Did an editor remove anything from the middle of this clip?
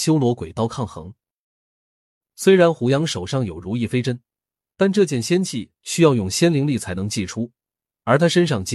no; 0 cuts

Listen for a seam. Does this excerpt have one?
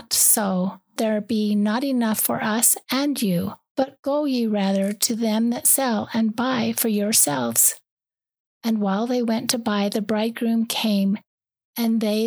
yes; 1 cut; at 1.0 s

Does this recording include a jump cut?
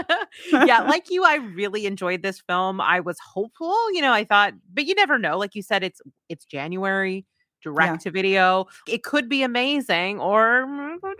no; 0 cuts

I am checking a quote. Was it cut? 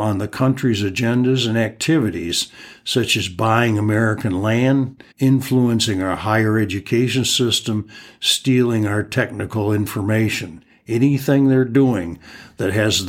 yes; 1 cut; at 5.1 s

